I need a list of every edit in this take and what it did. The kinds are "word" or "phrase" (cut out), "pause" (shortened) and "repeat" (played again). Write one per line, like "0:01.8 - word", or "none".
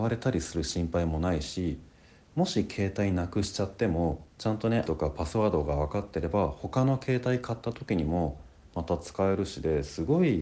0:04.3 - pause
0:04.9 - word